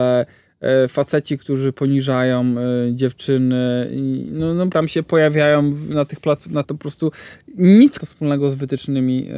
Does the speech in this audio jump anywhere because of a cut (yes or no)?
yes